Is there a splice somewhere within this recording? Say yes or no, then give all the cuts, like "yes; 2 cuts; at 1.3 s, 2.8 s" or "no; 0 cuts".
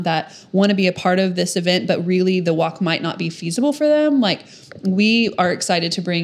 no; 0 cuts